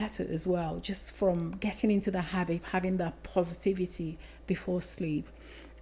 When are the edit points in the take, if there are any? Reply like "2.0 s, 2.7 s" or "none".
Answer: 2.6 s